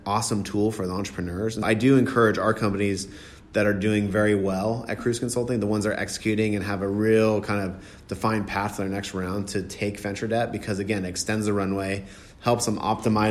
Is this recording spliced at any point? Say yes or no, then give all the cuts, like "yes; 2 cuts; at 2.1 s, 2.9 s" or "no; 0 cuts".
yes; 1 cut; at 1.6 s